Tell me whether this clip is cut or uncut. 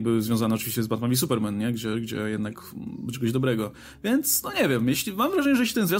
cut